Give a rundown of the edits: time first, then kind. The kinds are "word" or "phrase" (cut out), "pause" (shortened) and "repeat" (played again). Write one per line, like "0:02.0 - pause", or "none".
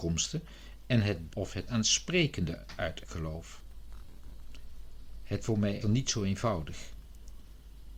0:01.3 - word
0:01.7 - word
0:03.0 - word
0:05.4 - word
0:05.8 - word